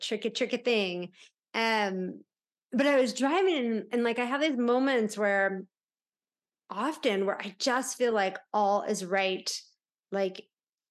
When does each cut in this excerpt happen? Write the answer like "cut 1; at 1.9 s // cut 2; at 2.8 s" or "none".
none